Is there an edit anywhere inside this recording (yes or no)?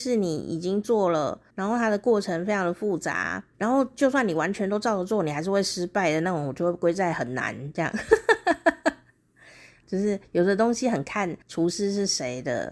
yes